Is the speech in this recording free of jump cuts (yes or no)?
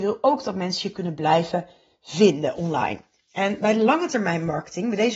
yes